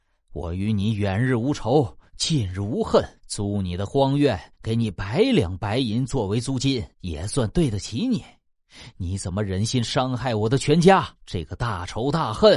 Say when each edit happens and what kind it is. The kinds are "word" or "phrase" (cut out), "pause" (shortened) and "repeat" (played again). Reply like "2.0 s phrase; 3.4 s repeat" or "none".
3.2 s pause; 4.5 s pause; 6.9 s pause; 11.2 s pause